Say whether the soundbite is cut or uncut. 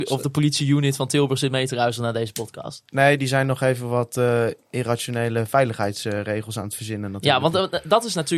uncut